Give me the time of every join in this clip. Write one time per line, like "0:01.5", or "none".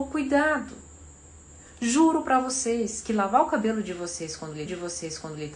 0:04.7